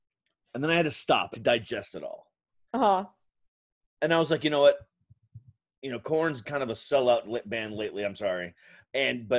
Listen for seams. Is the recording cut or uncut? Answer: cut